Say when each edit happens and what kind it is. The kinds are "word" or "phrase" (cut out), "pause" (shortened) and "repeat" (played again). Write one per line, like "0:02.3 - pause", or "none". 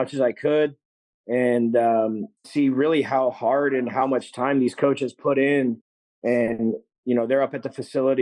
0:02.4 - phrase